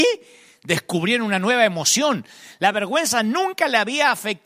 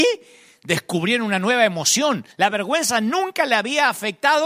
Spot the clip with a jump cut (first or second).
second